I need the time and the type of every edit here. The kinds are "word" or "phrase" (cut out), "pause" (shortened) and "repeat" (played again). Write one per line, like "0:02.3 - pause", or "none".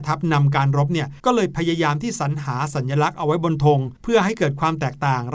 0:01.2 - pause
0:04.0 - pause